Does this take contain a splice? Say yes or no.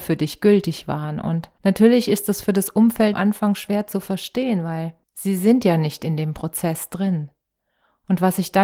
yes